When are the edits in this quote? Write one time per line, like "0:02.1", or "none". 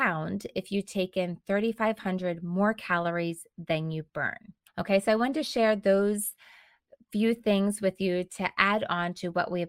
0:04.7